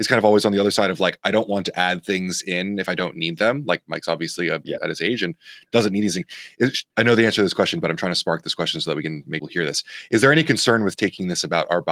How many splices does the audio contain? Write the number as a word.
three